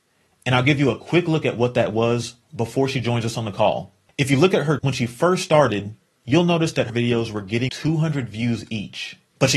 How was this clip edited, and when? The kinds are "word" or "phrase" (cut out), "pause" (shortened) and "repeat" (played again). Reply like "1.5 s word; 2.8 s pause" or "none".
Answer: 4.8 s word; 6.9 s word; 7.7 s word